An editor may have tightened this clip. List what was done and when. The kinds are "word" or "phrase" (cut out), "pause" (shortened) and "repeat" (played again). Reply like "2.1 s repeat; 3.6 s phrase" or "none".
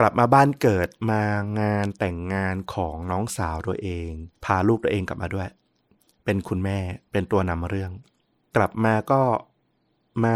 4.4 s pause